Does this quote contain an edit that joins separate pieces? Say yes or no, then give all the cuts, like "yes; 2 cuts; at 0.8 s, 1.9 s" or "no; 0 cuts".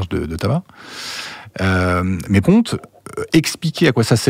yes; 1 cut; at 2.4 s